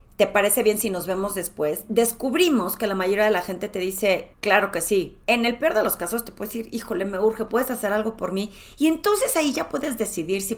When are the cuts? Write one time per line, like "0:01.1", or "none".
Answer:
0:04.3
0:05.2